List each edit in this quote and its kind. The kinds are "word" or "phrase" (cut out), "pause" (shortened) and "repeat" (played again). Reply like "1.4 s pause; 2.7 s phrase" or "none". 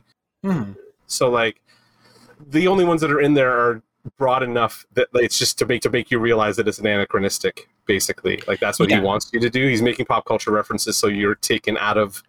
5.8 s repeat